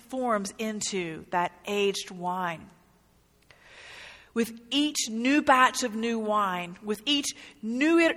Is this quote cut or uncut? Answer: uncut